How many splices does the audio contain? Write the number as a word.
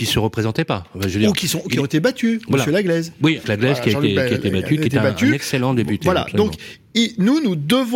one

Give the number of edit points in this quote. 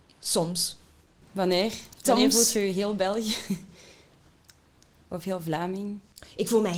zero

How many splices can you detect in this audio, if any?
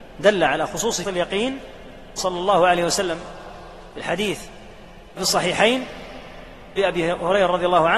four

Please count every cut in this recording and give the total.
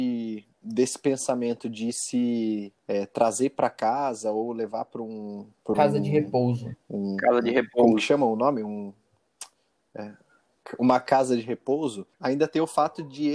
two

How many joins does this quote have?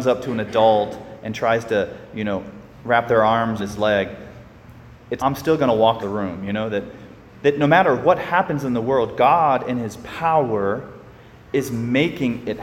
four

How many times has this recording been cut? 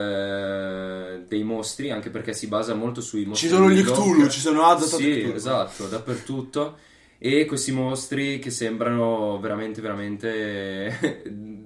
zero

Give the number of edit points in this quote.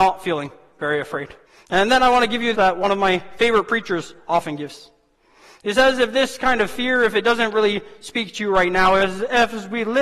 two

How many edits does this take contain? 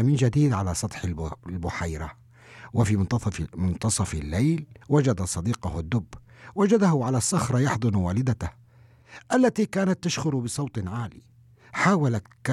one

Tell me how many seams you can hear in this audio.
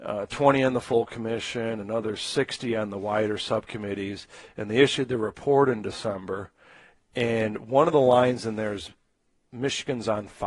zero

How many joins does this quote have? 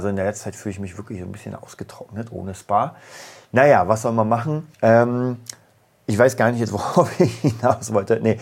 one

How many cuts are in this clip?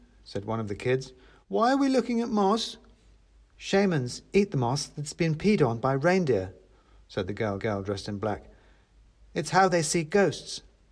one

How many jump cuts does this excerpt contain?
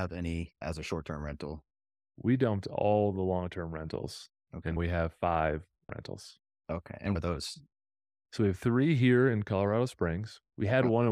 three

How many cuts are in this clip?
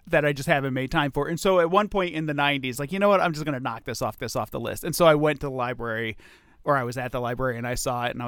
two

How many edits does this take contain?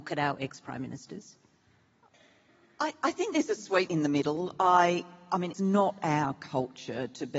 two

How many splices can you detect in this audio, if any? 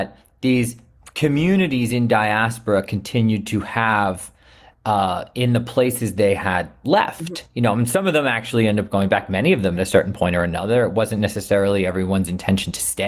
one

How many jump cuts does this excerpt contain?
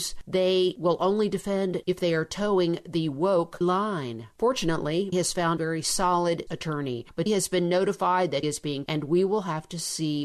eight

